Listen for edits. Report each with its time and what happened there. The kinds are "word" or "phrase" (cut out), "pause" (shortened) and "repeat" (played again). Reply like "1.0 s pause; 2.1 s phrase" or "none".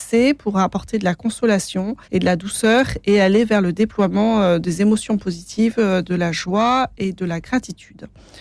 2.0 s pause

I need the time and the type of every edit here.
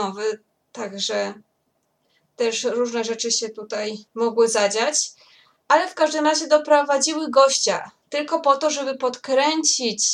4.1 s pause

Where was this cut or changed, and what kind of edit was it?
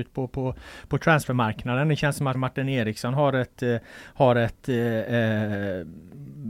2.3 s word

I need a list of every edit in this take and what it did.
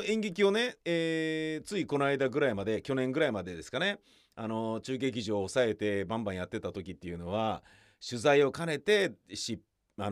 none

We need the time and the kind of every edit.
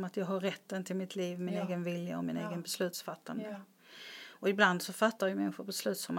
1.1 s word

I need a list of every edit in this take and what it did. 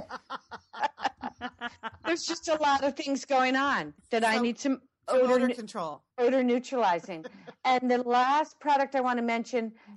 4.0 s pause; 6.1 s pause

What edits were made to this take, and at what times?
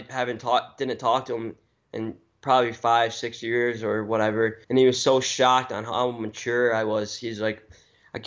4.6 s pause

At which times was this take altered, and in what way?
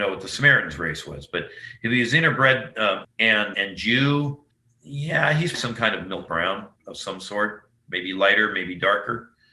3.0 s phrase; 3.5 s word; 4.5 s pause; 5.5 s word; 6.3 s word; 6.8 s pause

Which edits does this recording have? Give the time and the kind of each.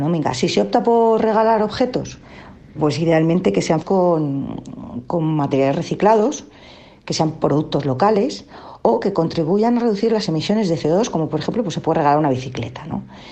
2.8 s word; 3.8 s word

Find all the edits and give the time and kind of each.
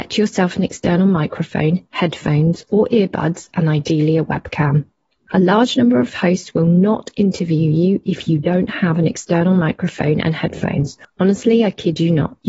none

